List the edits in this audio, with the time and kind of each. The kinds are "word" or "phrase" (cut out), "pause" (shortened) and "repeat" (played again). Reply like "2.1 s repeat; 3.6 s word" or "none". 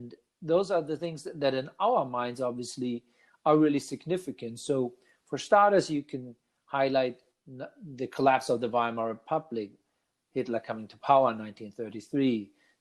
none